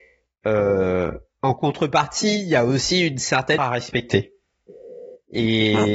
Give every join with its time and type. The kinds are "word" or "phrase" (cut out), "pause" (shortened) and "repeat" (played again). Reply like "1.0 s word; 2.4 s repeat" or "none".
3.6 s word